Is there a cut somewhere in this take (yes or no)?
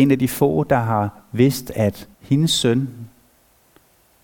yes